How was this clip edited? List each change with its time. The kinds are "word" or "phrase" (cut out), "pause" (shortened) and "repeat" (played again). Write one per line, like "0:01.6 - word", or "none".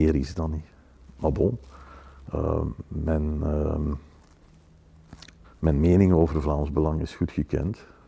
0:05.4 - pause